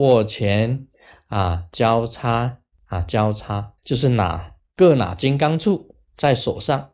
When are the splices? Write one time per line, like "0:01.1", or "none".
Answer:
0:03.8
0:04.6